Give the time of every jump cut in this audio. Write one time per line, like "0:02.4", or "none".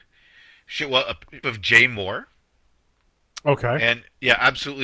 0:01.4